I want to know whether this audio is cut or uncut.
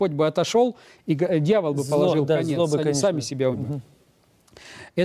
cut